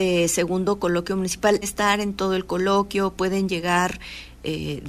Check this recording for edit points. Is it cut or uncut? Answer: cut